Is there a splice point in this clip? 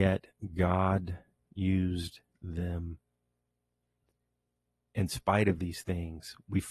no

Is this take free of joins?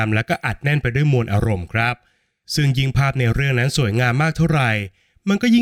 yes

